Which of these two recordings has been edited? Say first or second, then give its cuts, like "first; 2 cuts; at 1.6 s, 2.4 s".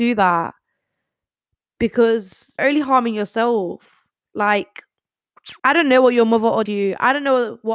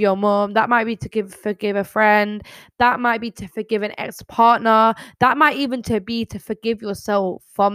first; 3 cuts; at 2.6 s, 5.6 s, 6.7 s